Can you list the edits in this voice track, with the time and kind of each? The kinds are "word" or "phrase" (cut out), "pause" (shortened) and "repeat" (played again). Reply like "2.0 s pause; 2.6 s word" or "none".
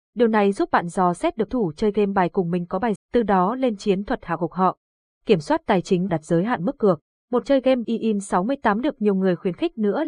1.5 s word; 3.0 s word; 6.1 s word; 7.4 s word; 7.8 s word